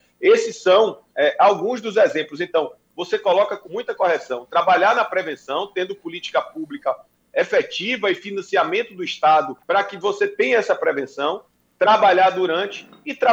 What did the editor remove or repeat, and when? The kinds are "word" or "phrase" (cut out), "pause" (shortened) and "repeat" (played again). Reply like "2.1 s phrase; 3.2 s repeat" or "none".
1.1 s pause; 3.6 s word; 9.6 s pause